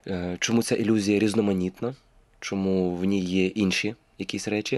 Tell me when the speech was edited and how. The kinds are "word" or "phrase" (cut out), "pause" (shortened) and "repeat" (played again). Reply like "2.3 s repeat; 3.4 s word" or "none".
none